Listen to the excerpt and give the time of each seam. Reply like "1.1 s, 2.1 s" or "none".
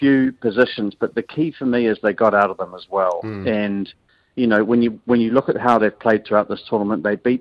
none